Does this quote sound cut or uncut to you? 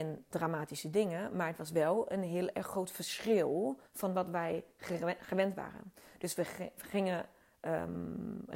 cut